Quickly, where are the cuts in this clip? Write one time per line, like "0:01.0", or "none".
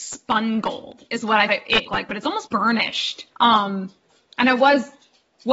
0:01.5
0:01.9
0:02.5
0:03.3